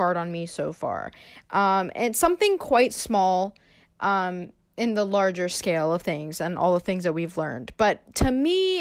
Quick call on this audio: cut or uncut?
uncut